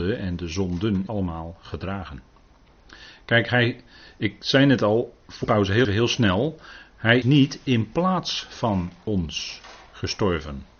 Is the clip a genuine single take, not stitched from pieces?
no; 4 cuts; at 1.1 s, 5.4 s, 5.8 s, 7.2 s

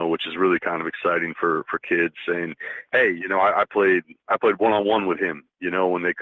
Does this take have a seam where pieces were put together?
no; 0 cuts

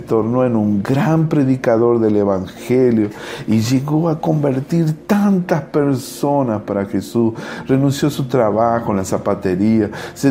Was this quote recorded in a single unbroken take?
yes; 0 cuts

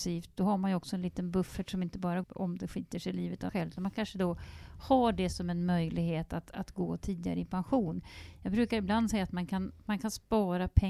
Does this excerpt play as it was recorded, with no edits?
no; 2 cuts; at 2.2 s, 3.5 s

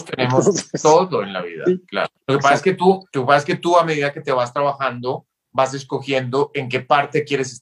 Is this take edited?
yes; 2 cuts; at 2.2 s, 3.1 s

